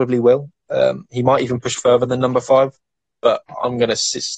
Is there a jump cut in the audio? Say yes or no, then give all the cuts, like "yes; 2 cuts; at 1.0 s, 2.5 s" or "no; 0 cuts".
no; 0 cuts